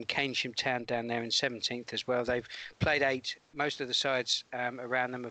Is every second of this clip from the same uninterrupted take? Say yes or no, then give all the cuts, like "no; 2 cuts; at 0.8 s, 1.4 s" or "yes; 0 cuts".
yes; 0 cuts